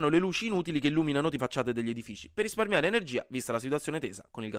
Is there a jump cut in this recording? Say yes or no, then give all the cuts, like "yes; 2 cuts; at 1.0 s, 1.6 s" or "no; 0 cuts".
yes; 1 cut; at 1.4 s